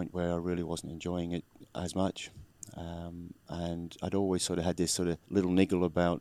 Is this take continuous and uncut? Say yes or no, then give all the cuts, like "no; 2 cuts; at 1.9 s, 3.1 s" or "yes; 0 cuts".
no; 1 cut; at 5.2 s